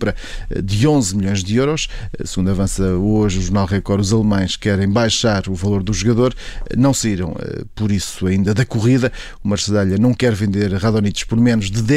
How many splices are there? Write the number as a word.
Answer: zero